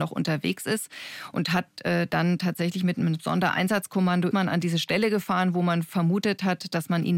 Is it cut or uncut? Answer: cut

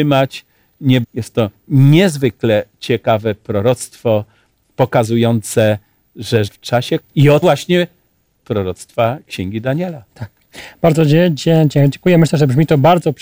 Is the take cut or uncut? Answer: cut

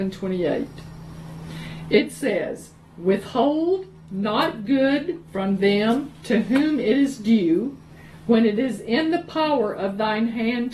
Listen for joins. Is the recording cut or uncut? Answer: uncut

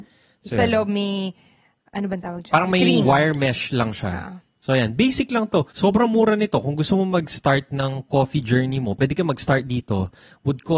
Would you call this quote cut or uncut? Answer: cut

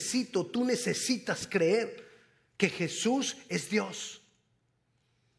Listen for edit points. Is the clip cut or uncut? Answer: uncut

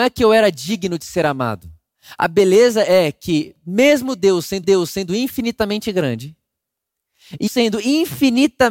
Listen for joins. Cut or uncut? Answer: cut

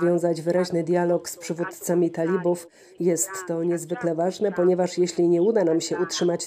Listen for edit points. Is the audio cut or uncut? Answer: uncut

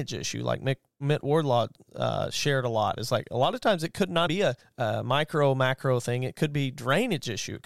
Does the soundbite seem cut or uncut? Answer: cut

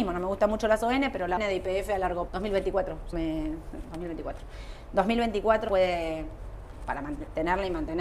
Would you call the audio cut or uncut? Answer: cut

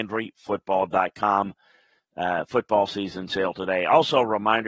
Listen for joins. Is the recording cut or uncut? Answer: uncut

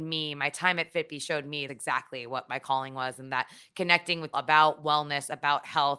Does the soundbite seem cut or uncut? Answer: cut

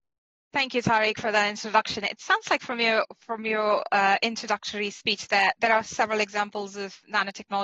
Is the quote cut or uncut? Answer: uncut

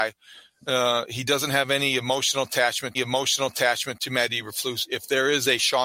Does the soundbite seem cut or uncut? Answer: cut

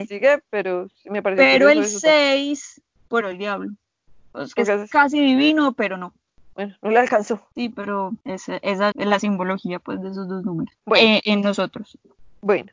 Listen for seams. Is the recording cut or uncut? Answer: cut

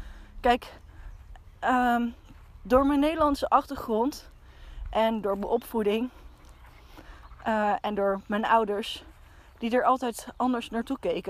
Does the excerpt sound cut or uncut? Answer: uncut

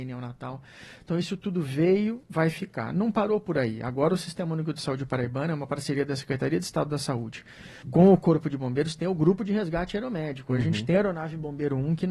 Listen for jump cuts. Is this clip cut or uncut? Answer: cut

